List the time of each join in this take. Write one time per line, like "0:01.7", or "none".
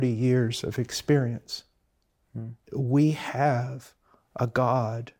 0:02.6